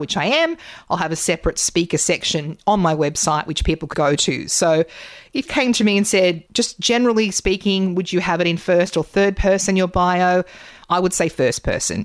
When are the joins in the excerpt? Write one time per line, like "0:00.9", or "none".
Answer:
0:03.9
0:05.5
0:06.5